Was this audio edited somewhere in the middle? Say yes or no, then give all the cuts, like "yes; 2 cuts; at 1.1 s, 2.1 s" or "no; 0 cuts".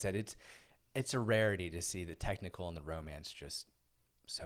no; 0 cuts